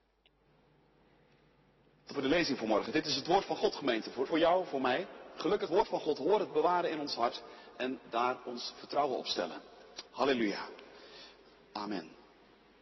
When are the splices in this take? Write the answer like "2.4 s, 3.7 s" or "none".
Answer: 2.1 s, 4.3 s, 5.7 s, 6.5 s, 10.1 s